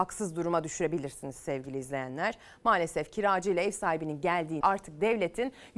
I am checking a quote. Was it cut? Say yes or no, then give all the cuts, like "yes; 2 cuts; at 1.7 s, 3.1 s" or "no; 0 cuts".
yes; 1 cut; at 4.6 s